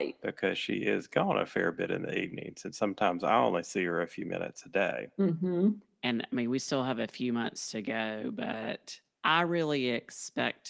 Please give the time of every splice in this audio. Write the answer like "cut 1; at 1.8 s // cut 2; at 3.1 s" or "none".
none